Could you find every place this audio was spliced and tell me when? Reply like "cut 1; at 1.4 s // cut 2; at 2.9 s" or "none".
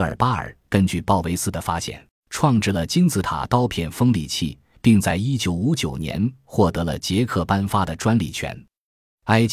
cut 1; at 2.1 s // cut 2; at 4.7 s